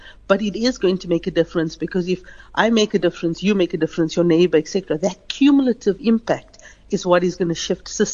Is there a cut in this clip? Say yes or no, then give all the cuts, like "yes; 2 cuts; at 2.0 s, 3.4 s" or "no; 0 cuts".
no; 0 cuts